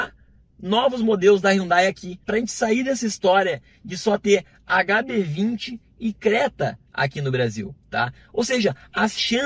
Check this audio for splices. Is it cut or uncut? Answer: cut